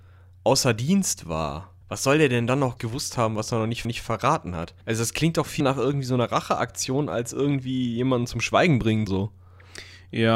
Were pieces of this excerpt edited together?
yes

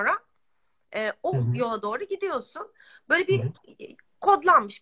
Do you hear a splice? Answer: no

